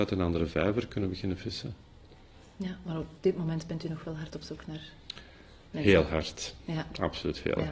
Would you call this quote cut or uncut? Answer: uncut